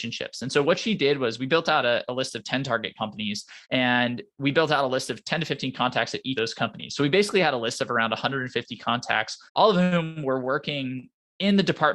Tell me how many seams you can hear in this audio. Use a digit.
3